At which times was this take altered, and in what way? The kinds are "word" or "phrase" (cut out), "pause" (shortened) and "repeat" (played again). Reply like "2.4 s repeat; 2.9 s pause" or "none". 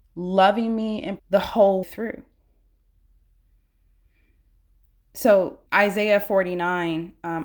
1.2 s phrase; 1.8 s word; 5.7 s pause